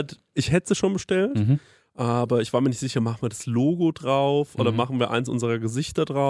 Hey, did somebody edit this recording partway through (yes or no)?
no